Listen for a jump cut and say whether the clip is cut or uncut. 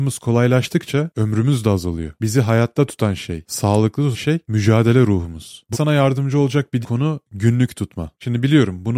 cut